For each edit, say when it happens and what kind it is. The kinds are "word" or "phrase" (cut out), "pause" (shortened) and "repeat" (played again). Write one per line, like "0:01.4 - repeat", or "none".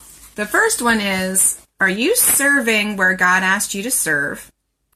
none